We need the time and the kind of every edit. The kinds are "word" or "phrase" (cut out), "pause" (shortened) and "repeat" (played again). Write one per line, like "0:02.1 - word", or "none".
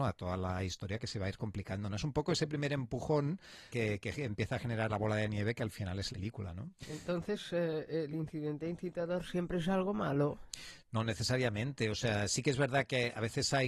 0:03.7 - word
0:04.9 - word
0:06.1 - phrase
0:06.8 - pause